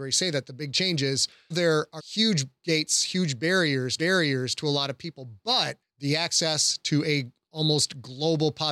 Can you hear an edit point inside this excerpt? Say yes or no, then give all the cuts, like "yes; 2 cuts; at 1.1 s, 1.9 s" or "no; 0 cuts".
yes; 4 cuts; at 1.5 s, 2.0 s, 4.0 s, 5.8 s